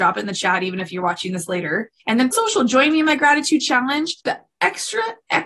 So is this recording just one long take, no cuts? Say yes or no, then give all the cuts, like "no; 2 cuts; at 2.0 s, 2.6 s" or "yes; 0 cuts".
no; 3 cuts; at 2.0 s, 2.3 s, 4.2 s